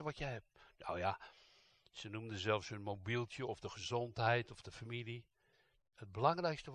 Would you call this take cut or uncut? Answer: uncut